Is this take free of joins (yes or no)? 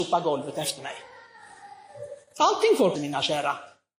no